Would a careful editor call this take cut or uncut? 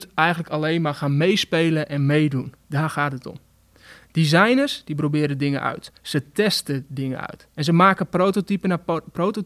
cut